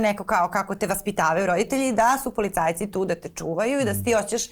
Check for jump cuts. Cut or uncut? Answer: uncut